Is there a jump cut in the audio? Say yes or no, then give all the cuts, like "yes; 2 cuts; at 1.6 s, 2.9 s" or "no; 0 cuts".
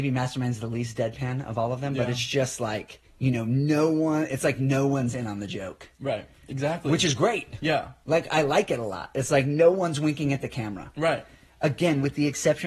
yes; 1 cut; at 3.1 s